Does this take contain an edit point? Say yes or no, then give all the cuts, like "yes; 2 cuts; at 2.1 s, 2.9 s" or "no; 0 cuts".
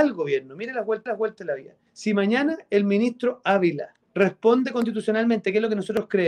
yes; 3 cuts; at 1.1 s, 1.9 s, 4.0 s